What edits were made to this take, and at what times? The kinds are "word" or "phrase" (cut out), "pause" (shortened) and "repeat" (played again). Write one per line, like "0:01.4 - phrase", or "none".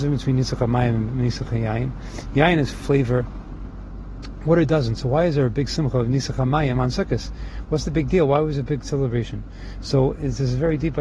none